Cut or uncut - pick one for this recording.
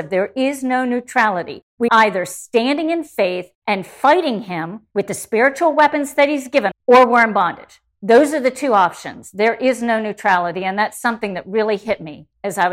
cut